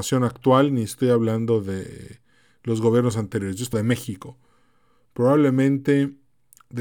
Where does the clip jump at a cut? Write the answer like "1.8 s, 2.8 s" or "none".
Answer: 3.7 s